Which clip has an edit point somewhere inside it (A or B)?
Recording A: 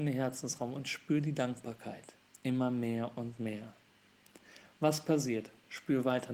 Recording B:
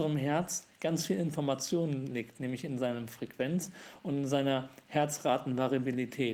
A